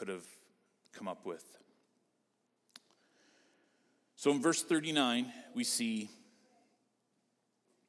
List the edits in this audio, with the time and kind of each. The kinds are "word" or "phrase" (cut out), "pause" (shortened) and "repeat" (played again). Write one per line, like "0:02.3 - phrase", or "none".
none